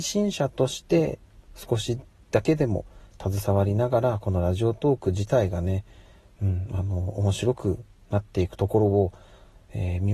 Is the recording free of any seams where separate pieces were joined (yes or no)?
yes